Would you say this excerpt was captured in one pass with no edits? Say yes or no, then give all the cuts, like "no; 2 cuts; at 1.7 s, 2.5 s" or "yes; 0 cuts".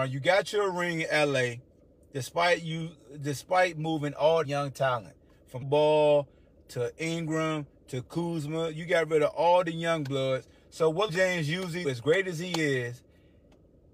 no; 4 cuts; at 4.4 s, 5.6 s, 11.1 s, 11.8 s